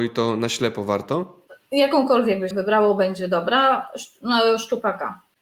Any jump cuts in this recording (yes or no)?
yes